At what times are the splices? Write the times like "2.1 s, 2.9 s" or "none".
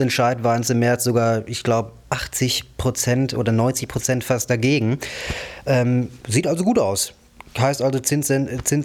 none